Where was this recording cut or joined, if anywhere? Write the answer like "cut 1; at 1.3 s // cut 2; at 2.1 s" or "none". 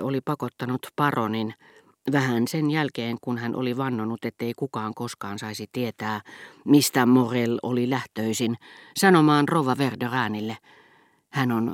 none